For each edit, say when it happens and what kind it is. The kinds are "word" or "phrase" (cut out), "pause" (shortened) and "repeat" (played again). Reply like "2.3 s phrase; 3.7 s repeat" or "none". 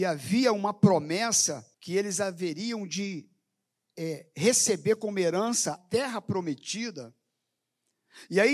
1.7 s pause; 5.8 s word